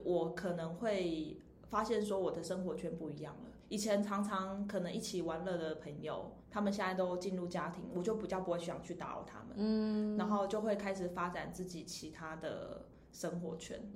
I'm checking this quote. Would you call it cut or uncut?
cut